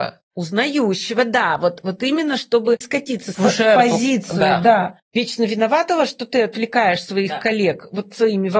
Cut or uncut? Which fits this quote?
cut